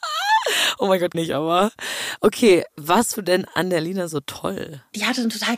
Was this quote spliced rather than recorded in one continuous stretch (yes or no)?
yes